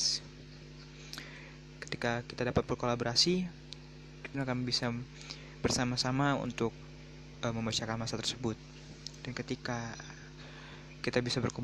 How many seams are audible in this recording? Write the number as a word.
one